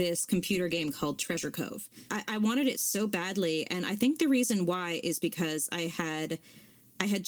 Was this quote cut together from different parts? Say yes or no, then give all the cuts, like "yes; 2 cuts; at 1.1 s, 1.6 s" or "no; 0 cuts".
no; 0 cuts